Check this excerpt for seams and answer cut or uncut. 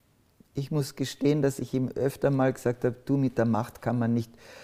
uncut